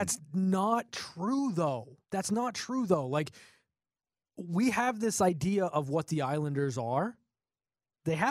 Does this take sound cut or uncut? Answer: cut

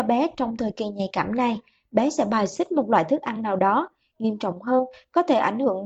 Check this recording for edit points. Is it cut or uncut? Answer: uncut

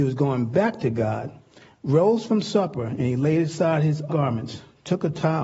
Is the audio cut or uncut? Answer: cut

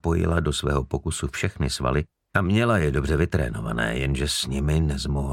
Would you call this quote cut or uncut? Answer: uncut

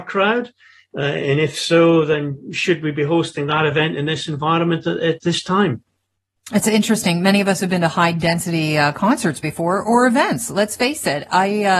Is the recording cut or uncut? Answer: uncut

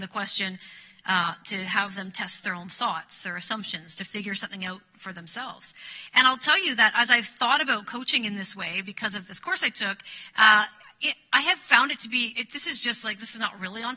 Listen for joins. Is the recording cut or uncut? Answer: uncut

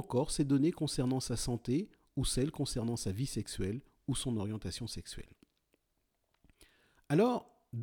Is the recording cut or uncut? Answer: uncut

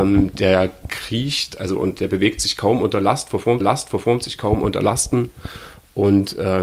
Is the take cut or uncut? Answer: cut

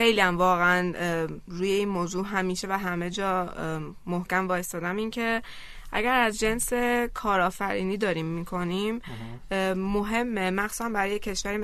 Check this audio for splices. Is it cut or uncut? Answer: uncut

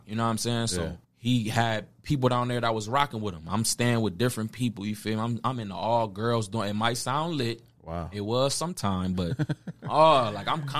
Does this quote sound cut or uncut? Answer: cut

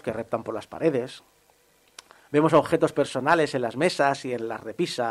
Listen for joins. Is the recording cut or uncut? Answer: uncut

